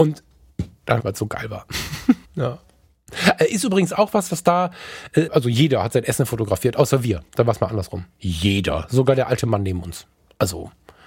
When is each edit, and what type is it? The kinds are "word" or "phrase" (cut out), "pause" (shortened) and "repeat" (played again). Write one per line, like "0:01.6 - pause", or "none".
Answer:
0:01.0 - phrase
0:02.2 - pause
0:05.3 - phrase
0:07.3 - pause